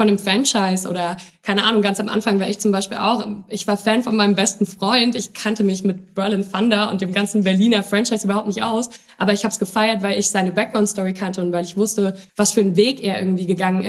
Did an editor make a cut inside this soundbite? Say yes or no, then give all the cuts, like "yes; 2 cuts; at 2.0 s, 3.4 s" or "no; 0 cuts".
yes; 1 cut; at 12.3 s